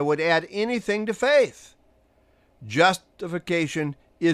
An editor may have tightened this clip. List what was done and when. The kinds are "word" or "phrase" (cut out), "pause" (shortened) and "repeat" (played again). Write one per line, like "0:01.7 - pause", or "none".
none